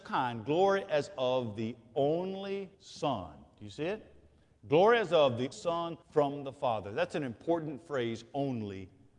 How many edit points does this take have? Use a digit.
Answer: 3